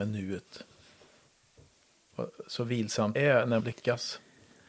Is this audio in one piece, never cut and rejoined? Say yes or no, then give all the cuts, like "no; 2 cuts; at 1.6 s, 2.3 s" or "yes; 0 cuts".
no; 2 cuts; at 3.2 s, 3.6 s